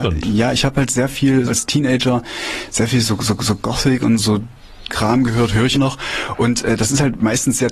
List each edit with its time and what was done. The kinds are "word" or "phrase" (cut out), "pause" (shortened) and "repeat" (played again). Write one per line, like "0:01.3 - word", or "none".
0:01.5 - word
0:03.4 - repeat
0:04.2 - word
0:04.9 - word
0:05.7 - phrase